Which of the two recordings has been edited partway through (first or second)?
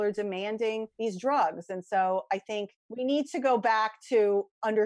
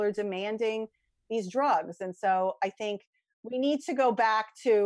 first